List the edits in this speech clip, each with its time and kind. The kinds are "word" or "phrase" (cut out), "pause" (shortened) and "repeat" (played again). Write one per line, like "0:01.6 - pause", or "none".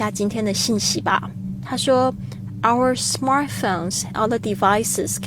0:04.1 - word